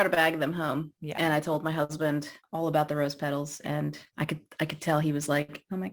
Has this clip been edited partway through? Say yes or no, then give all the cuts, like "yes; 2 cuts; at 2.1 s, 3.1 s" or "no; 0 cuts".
no; 0 cuts